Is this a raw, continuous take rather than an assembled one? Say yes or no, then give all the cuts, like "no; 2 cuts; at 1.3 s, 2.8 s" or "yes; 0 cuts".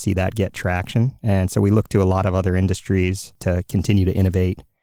yes; 0 cuts